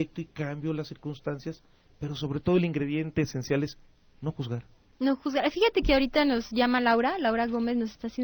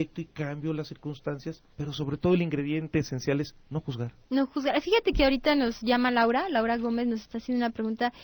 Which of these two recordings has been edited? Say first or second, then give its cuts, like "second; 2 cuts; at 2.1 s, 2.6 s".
second; 3 cuts; at 1.7 s, 3.6 s, 4.2 s